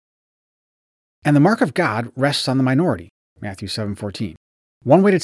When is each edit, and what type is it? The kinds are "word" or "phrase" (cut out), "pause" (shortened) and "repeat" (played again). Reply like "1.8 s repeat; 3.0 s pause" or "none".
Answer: none